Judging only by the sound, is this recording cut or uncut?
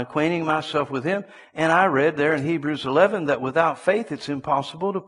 uncut